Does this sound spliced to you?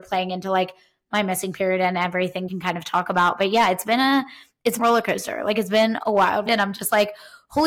yes; 3 cuts; at 2.5 s, 4.8 s, 6.5 s

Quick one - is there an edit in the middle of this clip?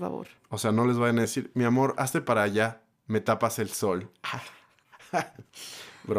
no; 0 cuts

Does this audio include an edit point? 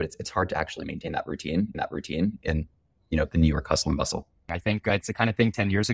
yes; 1 cut; at 1.7 s

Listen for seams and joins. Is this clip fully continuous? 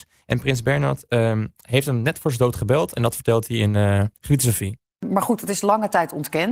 yes; 0 cuts

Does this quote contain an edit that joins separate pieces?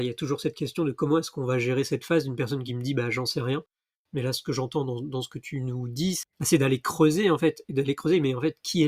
no; 0 cuts

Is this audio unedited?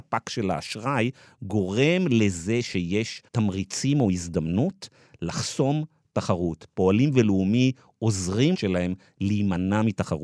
no; 2 cuts; at 3.3 s, 8.5 s

